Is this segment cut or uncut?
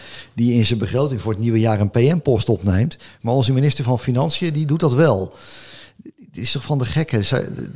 uncut